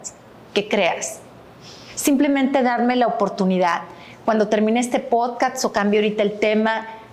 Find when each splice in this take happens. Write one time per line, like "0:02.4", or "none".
none